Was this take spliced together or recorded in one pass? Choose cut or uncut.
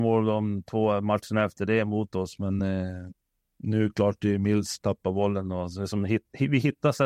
uncut